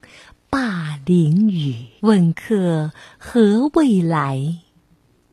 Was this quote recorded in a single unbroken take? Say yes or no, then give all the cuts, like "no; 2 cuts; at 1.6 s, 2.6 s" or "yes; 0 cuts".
no; 1 cut; at 2.0 s